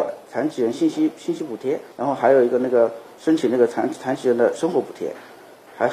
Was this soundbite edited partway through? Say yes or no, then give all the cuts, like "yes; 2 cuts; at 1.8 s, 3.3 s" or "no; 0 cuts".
yes; 1 cut; at 1.9 s